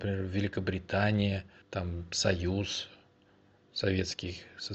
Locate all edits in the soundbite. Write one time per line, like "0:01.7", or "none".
0:01.6